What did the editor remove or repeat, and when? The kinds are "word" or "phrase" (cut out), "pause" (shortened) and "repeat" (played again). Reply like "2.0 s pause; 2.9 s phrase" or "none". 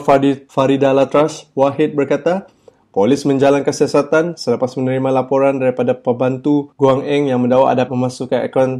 7.9 s word